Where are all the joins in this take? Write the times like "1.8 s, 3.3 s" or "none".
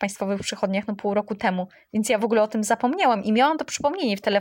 none